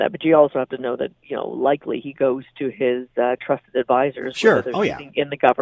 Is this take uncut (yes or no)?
yes